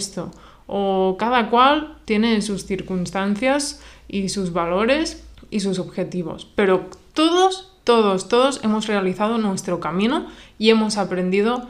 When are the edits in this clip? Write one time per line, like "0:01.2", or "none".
0:05.3